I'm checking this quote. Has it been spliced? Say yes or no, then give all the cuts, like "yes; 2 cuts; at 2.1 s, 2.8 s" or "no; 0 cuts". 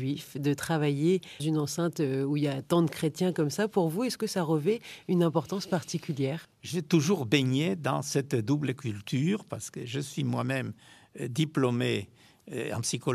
yes; 2 cuts; at 1.4 s, 6.5 s